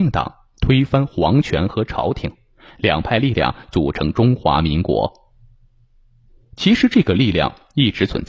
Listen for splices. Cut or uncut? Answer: uncut